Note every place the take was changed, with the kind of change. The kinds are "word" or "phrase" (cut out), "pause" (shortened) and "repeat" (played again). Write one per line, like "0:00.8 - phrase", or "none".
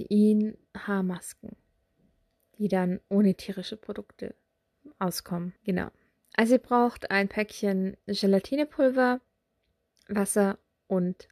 0:05.6 - pause

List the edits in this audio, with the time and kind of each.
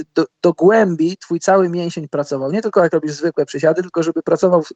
none

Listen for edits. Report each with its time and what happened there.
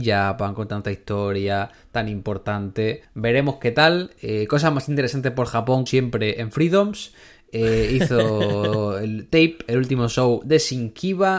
0:03.0 - pause
0:05.9 - word

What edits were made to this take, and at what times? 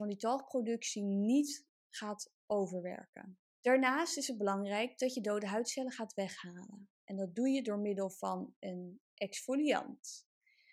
0:03.5 - pause
0:06.9 - pause

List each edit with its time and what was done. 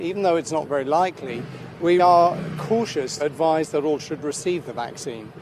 0:02.0 - word
0:03.2 - word
0:04.0 - word

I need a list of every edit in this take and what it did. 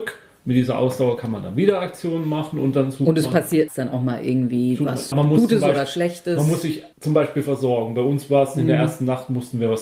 0:03.7 - word
0:05.1 - word
0:06.9 - pause

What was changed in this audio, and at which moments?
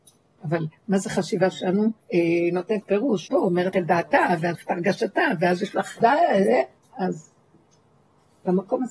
0:02.0 - pause
0:02.8 - word
0:03.3 - word
0:03.7 - word
0:04.5 - word
0:06.0 - word
0:06.8 - pause

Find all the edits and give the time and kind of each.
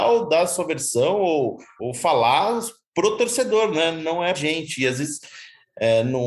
0:01.8 - word
0:04.3 - word

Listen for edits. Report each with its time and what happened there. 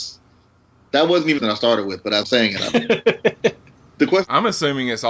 0:01.4 - phrase
0:02.2 - word

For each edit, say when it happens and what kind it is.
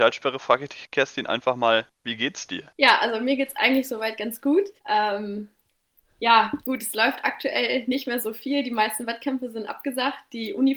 0:02.7 - pause
0:04.8 - pause
0:06.6 - pause

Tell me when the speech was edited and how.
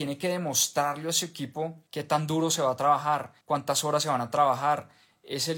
0:01.9 - pause
0:03.4 - pause

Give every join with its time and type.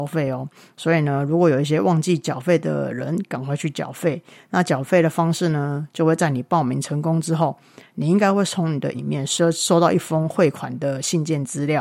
0:08.9 - word

